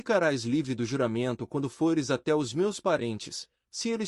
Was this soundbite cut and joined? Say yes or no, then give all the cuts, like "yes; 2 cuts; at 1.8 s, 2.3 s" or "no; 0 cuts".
no; 0 cuts